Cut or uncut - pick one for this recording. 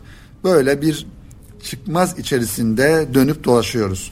uncut